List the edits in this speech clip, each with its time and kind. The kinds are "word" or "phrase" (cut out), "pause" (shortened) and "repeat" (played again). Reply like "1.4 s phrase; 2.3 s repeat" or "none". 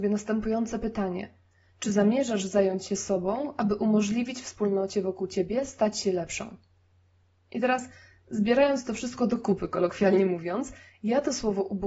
none